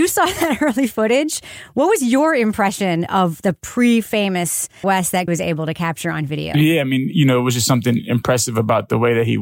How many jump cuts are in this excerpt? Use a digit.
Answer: 2